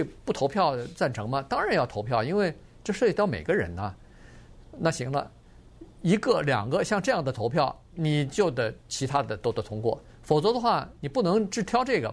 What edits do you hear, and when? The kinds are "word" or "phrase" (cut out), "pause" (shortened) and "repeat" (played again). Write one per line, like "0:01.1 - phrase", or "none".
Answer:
0:07.9 - pause
0:08.8 - pause